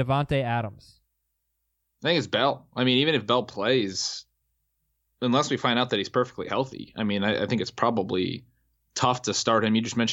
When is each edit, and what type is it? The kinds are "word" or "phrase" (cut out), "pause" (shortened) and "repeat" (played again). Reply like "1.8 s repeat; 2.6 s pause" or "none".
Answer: none